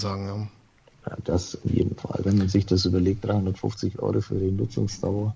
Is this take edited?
no; 0 cuts

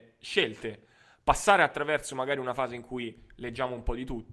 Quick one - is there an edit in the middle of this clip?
no; 0 cuts

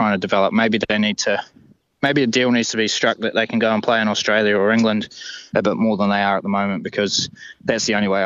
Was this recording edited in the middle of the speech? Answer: no; 0 cuts

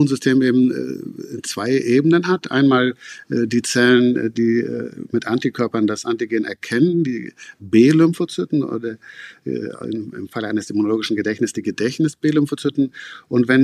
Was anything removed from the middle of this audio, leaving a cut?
no; 0 cuts

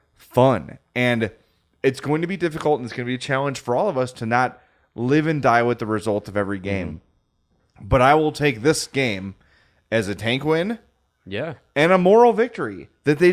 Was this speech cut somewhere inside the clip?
no; 0 cuts

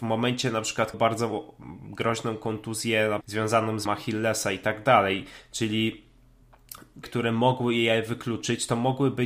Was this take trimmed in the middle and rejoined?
yes; 4 cuts; at 0.9 s, 3.2 s, 3.8 s, 7.0 s

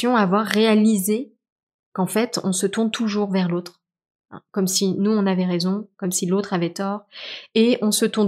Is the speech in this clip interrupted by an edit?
no; 0 cuts

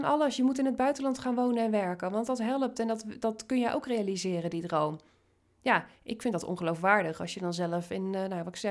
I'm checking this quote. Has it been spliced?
no; 0 cuts

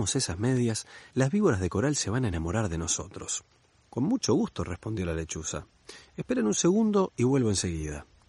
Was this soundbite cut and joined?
no; 0 cuts

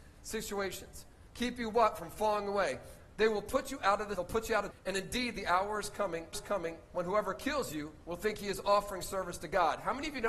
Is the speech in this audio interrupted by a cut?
yes; 5 cuts; at 1.3 s, 4.1 s, 4.7 s, 6.3 s, 8.0 s

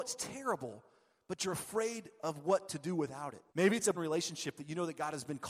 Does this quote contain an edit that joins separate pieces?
yes; 2 cuts; at 3.5 s, 3.9 s

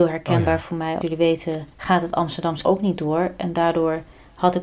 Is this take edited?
yes; 3 cuts; at 1.0 s, 1.7 s, 2.6 s

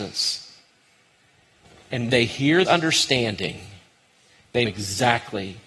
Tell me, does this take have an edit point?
yes; 3 cuts; at 2.1 s, 2.6 s, 4.6 s

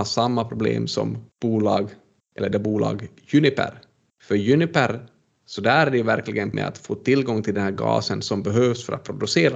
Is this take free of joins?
no; 3 cuts; at 1.3 s, 2.5 s, 6.5 s

